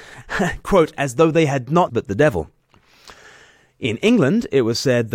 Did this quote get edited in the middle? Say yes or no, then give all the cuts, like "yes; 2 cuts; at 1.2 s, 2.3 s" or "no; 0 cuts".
yes; 1 cut; at 1.9 s